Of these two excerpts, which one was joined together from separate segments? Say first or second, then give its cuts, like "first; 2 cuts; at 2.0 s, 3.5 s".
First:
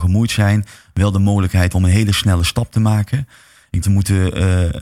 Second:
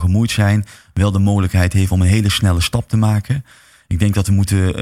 first; 2 cuts; at 1.7 s, 3.8 s